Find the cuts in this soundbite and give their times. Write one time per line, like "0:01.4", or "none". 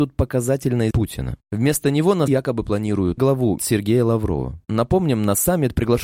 0:00.9
0:02.3
0:03.2
0:03.6